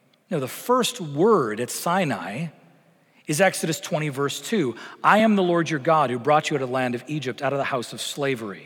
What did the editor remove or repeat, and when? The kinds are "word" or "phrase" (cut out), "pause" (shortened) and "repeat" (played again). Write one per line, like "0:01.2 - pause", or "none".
none